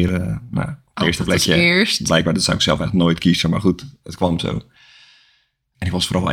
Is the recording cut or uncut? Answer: uncut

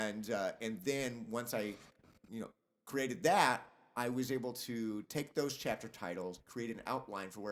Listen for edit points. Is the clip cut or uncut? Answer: cut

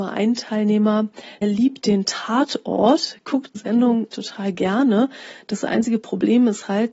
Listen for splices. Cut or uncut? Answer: cut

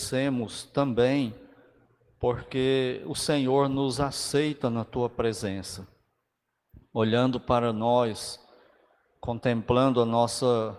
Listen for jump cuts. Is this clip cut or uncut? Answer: uncut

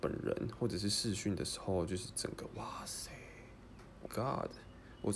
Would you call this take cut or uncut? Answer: cut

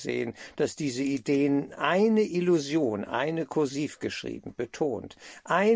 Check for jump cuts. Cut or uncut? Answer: uncut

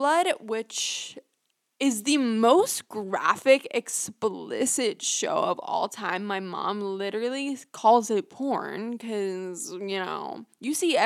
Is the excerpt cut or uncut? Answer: uncut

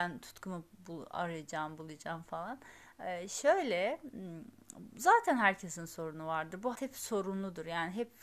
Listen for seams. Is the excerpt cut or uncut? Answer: cut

